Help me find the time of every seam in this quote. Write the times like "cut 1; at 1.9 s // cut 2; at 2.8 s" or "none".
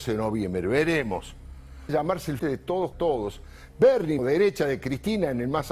cut 1; at 1.9 s // cut 2; at 2.4 s // cut 3; at 2.9 s // cut 4; at 4.2 s

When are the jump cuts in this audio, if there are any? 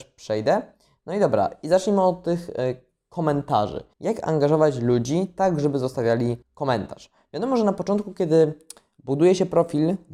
cut 1; at 3.9 s // cut 2; at 6.4 s

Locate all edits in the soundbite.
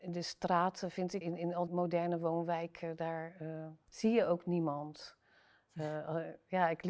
cut 1; at 1.2 s // cut 2; at 1.7 s // cut 3; at 3.8 s

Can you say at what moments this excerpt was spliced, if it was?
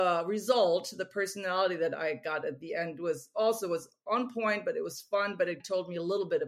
none

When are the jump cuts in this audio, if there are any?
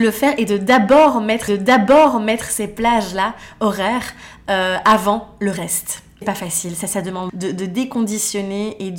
cut 1; at 1.5 s // cut 2; at 6.2 s // cut 3; at 7.3 s

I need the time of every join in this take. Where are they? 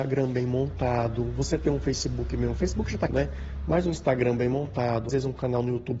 cut 1; at 3.1 s // cut 2; at 5.1 s

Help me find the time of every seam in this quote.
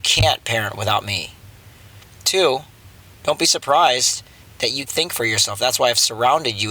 cut 1; at 4.9 s

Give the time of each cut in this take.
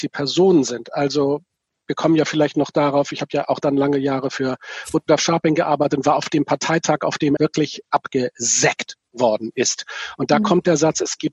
cut 1; at 7.4 s

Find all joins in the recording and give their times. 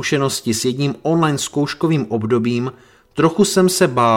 none

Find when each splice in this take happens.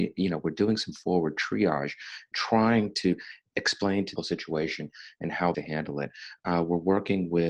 cut 1; at 2.3 s // cut 2; at 3.5 s // cut 3; at 4.2 s // cut 4; at 5.5 s

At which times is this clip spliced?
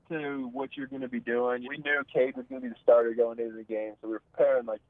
cut 1; at 1.6 s

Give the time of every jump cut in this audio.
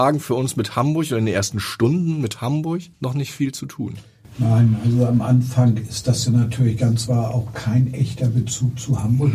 cut 1; at 2.9 s // cut 2; at 7.1 s

